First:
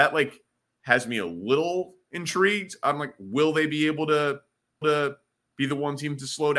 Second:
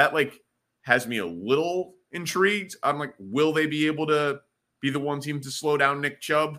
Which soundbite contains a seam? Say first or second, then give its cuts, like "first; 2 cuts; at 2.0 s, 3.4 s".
first; 1 cut; at 4.8 s